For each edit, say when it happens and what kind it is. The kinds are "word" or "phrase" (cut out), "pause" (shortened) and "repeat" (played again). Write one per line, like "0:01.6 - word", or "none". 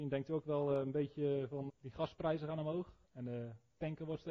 0:01.7 - word
0:03.0 - pause